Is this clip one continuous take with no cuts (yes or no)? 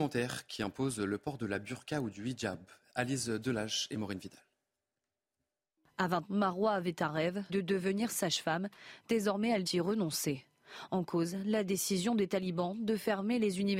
no